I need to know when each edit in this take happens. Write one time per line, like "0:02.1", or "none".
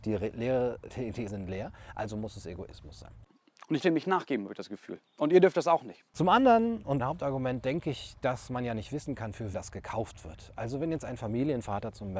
0:01.3
0:03.8
0:05.1
0:06.1
0:07.0
0:09.5